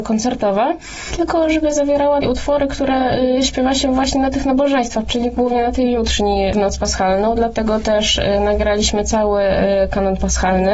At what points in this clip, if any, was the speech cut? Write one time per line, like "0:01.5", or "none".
0:02.2
0:05.1